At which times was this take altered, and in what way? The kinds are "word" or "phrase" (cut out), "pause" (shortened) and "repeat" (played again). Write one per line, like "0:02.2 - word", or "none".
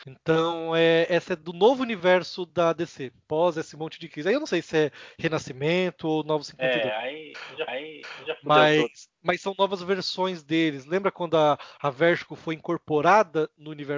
0:07.7 - repeat